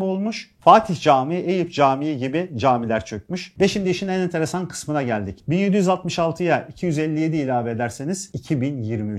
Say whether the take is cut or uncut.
uncut